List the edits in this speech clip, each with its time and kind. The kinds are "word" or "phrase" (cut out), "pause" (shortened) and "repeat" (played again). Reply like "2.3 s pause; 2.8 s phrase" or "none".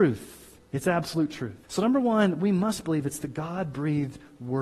1.6 s pause